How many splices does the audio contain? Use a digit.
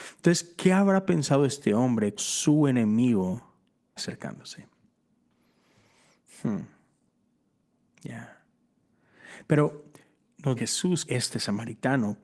4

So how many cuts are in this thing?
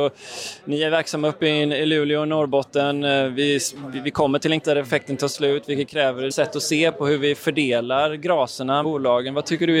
3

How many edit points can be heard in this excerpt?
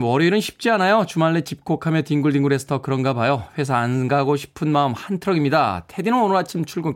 0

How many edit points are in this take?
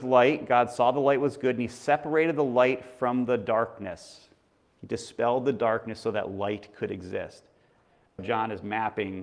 2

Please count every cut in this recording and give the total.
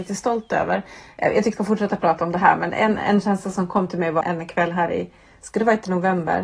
3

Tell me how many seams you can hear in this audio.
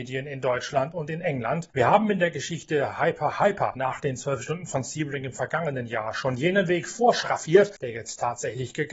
0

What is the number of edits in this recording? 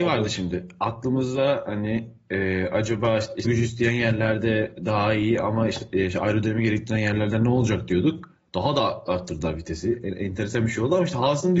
1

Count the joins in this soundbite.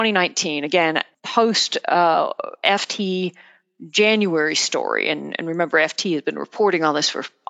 1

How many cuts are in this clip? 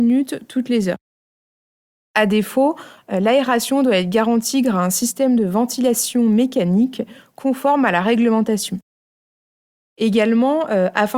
0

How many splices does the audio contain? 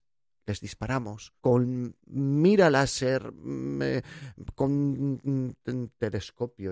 1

